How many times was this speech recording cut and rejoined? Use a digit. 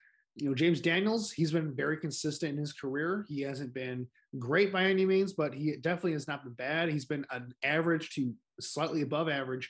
0